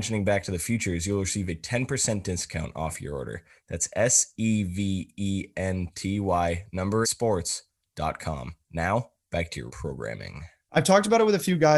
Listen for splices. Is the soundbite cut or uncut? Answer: cut